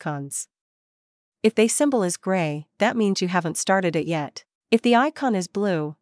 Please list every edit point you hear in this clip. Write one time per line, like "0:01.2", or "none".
0:04.6

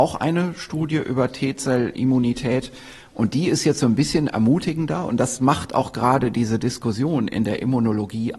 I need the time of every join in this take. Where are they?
none

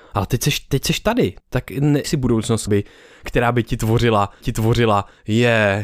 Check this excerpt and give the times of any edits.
0:01.4
0:02.0
0:02.7
0:04.4

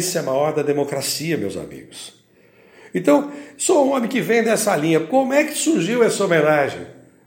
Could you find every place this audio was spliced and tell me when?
none

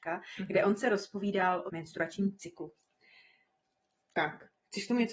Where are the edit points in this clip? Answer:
0:01.7

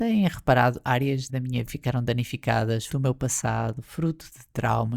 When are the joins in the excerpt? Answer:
0:01.3
0:01.7
0:02.9

